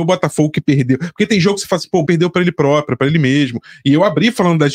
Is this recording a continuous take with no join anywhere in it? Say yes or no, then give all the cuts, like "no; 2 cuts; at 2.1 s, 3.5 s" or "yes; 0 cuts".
no; 1 cut; at 2.0 s